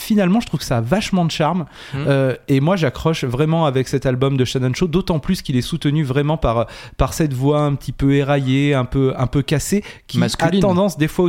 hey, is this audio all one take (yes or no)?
yes